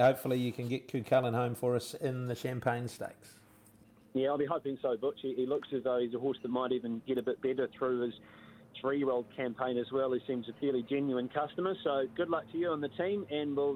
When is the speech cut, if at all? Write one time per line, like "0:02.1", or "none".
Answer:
none